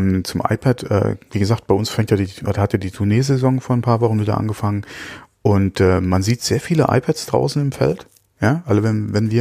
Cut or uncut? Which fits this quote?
uncut